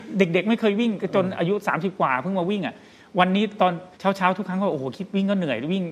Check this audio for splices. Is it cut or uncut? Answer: cut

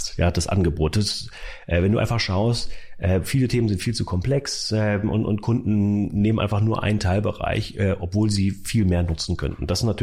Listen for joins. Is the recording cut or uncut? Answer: uncut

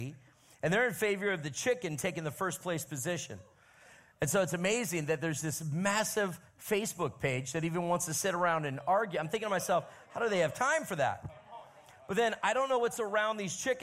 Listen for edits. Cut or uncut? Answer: uncut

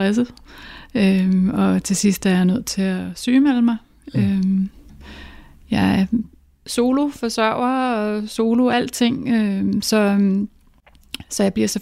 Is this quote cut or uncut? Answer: uncut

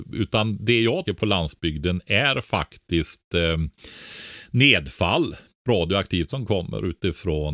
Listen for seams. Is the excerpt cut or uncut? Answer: cut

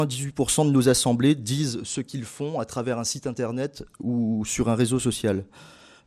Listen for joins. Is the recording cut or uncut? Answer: uncut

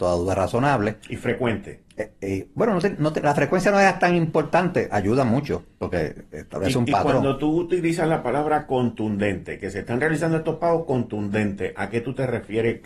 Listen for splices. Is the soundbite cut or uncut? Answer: uncut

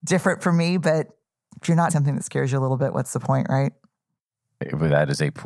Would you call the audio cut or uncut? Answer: cut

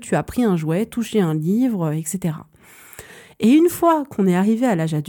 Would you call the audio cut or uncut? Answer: uncut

